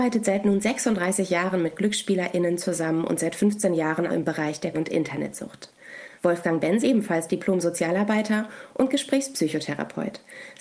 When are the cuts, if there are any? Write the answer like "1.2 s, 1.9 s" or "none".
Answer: 4.1 s, 4.7 s, 6.1 s, 6.8 s